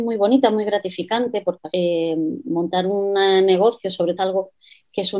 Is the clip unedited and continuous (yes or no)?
no